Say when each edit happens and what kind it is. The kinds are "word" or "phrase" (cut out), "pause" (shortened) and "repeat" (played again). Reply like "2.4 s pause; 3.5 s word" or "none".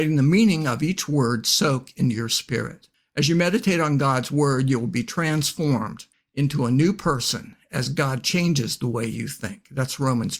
none